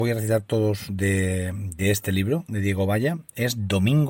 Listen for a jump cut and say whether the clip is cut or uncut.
uncut